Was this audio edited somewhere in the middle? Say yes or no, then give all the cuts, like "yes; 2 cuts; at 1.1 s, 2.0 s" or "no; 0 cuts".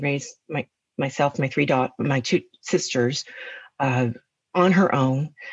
no; 0 cuts